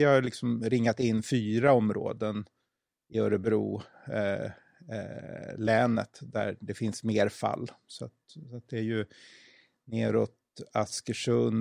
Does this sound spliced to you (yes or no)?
no